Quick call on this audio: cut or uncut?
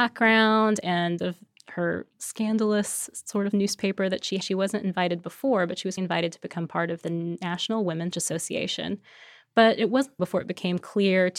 cut